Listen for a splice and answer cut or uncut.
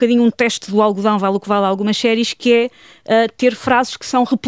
uncut